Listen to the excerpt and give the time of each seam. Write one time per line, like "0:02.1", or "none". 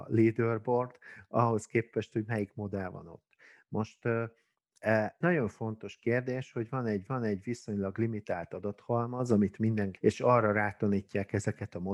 0:05.2
0:07.1
0:10.0